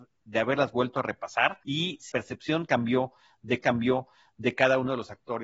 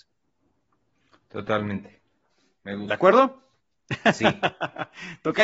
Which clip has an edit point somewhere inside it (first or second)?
first